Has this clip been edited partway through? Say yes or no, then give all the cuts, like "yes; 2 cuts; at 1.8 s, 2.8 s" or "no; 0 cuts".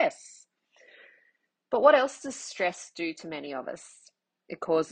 no; 0 cuts